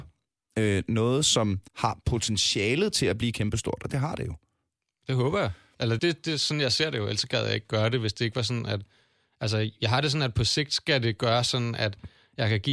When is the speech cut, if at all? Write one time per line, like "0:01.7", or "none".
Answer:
0:01.7
0:06.0